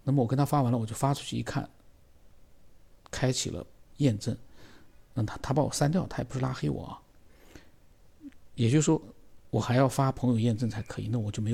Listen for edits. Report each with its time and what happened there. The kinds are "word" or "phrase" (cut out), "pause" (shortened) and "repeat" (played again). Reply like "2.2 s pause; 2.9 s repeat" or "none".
3.0 s pause; 3.9 s pause